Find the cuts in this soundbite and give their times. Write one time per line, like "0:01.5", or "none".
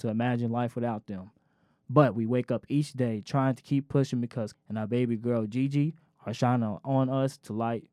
0:04.5